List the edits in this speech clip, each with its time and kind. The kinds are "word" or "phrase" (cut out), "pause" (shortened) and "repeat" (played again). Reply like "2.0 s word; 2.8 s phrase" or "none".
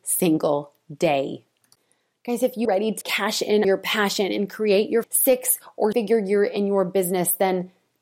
2.6 s word; 3.0 s word; 3.6 s word; 5.0 s word; 5.9 s word